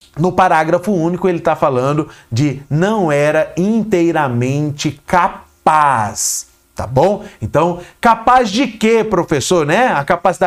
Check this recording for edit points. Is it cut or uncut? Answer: uncut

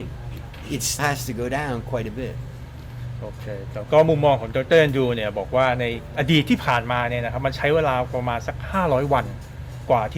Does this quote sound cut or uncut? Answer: cut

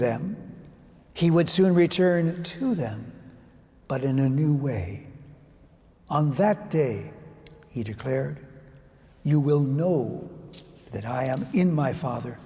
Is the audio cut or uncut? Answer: uncut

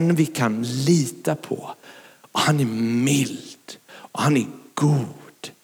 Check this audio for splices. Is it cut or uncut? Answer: uncut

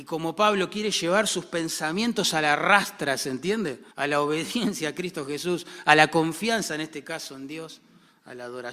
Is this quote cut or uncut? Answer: cut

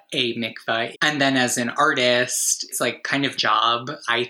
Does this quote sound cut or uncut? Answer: cut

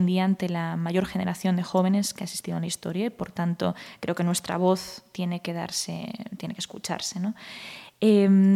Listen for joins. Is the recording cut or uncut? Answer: uncut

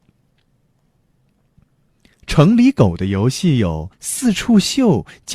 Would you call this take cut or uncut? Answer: cut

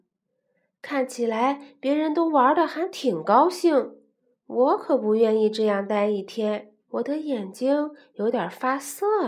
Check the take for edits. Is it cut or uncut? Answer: cut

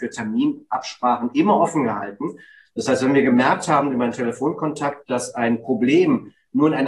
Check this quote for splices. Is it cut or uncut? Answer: uncut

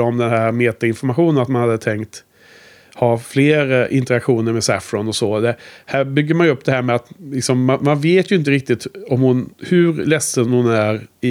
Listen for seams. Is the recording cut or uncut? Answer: uncut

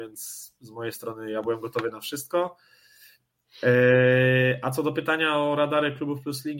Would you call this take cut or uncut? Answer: uncut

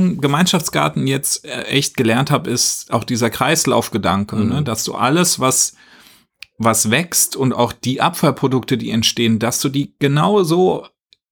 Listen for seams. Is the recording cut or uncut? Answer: uncut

